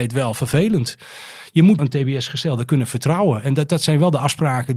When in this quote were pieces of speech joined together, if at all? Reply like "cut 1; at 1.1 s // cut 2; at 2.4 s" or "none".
cut 1; at 1.8 s

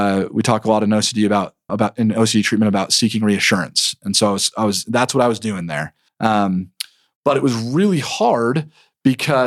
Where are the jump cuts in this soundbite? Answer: cut 1; at 1.7 s // cut 2; at 6.1 s

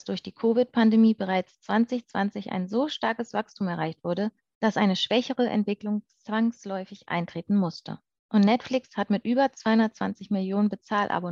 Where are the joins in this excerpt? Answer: none

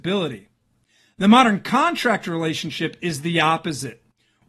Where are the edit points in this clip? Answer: none

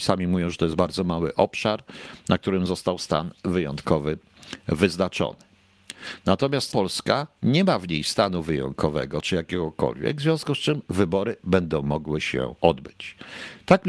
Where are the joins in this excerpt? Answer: cut 1; at 6.7 s // cut 2; at 12.6 s

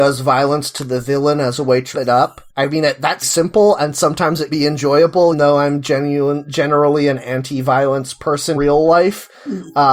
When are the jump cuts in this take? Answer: cut 1; at 1.9 s // cut 2; at 2.5 s // cut 3; at 3.2 s // cut 4; at 4.5 s // cut 5; at 5.3 s // cut 6; at 8.5 s

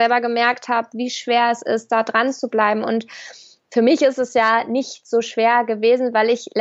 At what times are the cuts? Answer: none

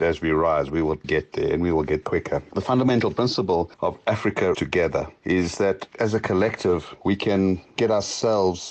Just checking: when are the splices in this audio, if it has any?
cut 1; at 1.0 s // cut 2; at 2.0 s // cut 3; at 4.5 s

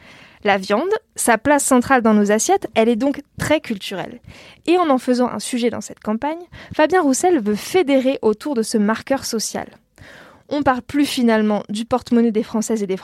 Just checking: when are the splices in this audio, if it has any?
none

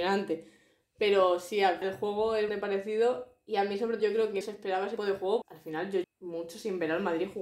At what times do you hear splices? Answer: cut 1; at 1.8 s // cut 2; at 2.5 s // cut 3; at 4.0 s // cut 4; at 4.4 s // cut 5; at 5.0 s // cut 6; at 5.4 s // cut 7; at 6.0 s

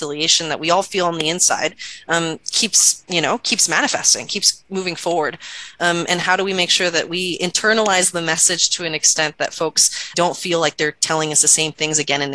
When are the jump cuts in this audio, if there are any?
cut 1; at 3.0 s // cut 2; at 6.1 s // cut 3; at 10.1 s

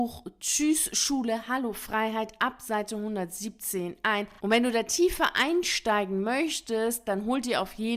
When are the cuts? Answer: none

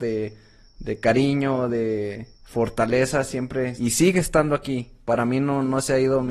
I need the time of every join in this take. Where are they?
cut 1; at 2.3 s // cut 2; at 3.8 s

